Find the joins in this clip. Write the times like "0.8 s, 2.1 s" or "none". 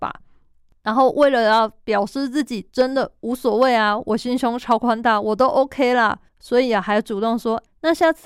6.3 s